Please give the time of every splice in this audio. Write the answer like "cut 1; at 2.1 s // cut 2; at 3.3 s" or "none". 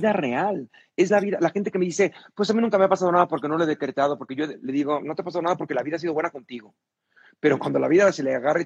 none